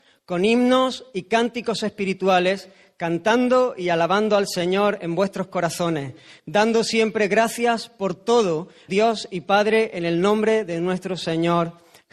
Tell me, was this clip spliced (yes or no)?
yes